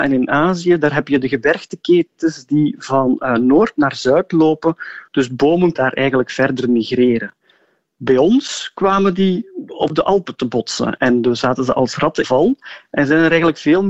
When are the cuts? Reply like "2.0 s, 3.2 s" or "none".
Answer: 5.7 s, 12.2 s